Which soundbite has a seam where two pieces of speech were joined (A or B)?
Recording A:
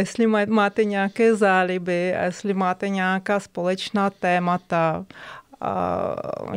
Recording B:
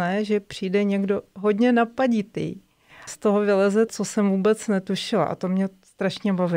B